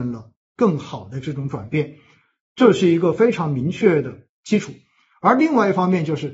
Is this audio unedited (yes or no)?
yes